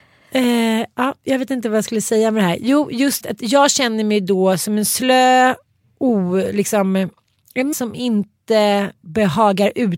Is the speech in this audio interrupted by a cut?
yes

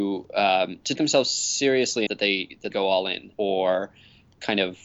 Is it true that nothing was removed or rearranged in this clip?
no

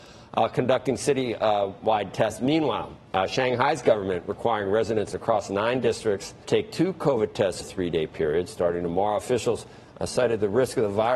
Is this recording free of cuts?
no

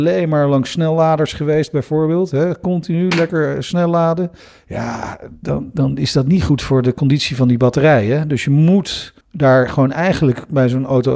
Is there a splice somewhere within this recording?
yes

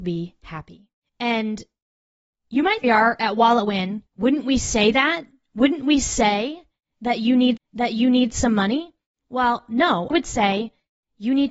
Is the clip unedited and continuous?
no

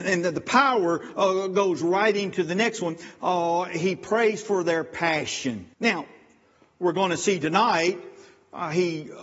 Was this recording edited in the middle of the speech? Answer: yes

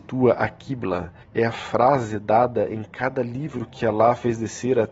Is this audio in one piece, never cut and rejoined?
no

